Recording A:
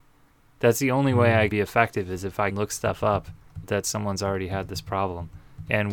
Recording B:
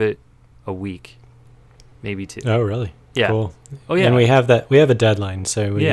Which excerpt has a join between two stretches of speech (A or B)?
A